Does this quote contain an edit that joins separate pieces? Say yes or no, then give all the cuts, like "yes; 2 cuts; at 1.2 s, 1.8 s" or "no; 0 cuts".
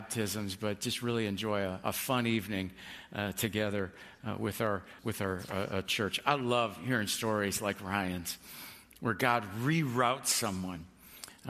yes; 1 cut; at 5.0 s